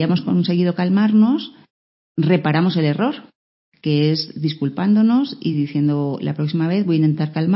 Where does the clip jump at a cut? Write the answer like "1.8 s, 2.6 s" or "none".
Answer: none

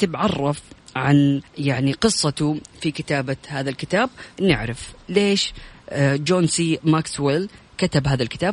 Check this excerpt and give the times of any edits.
1.5 s, 4.3 s

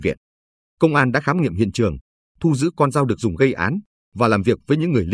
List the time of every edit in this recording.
none

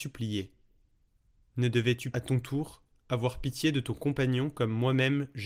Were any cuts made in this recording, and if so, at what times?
2.1 s

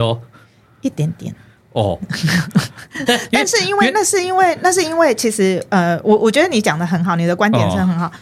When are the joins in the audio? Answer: 3.1 s

